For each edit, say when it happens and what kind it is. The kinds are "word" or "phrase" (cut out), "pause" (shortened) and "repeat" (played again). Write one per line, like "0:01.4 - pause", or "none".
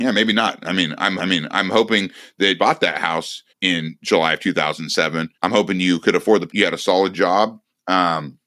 0:01.2 - repeat
0:02.6 - phrase
0:03.5 - pause
0:05.3 - pause
0:06.5 - word